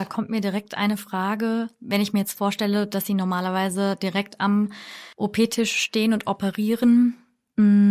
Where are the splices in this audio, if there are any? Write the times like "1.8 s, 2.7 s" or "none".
1.7 s, 5.1 s